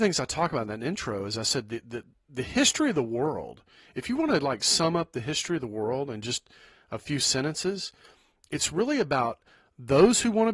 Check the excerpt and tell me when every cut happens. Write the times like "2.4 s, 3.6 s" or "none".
none